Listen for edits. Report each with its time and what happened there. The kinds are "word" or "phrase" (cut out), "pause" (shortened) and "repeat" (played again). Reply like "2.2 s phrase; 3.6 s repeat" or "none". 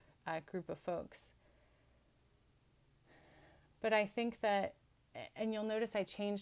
none